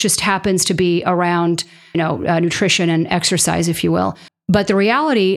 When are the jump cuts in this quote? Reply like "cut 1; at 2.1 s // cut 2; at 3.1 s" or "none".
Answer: cut 1; at 1.9 s // cut 2; at 4.3 s